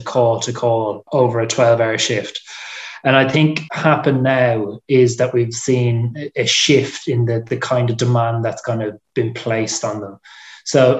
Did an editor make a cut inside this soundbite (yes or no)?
yes